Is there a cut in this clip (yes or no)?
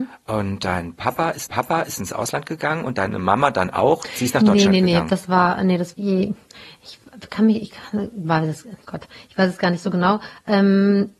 yes